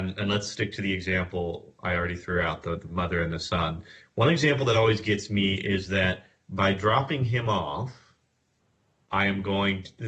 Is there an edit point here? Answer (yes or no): no